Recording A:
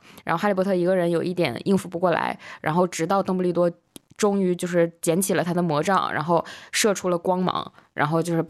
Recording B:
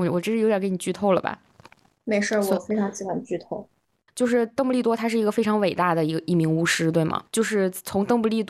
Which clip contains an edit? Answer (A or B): B